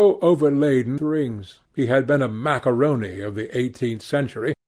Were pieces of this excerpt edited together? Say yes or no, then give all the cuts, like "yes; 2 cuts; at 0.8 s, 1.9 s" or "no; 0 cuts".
yes; 2 cuts; at 1.0 s, 1.7 s